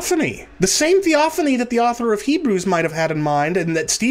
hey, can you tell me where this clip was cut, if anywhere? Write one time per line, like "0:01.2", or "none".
none